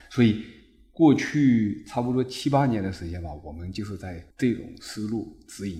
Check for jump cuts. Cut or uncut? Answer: cut